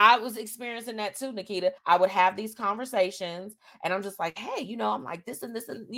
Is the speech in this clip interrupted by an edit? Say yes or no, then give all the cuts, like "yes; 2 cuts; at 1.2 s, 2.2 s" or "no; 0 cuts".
yes; 1 cut; at 1.8 s